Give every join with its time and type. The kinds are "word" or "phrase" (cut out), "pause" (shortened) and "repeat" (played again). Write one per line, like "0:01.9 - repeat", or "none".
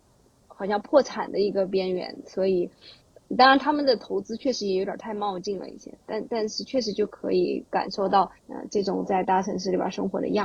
0:08.4 - pause